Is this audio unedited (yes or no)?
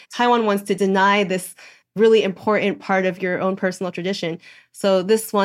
yes